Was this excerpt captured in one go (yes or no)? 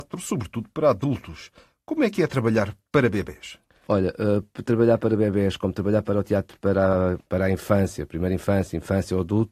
yes